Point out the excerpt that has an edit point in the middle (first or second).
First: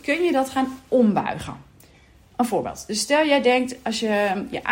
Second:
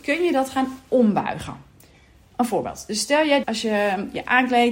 second